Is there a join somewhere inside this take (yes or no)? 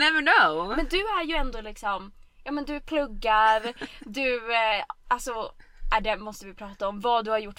no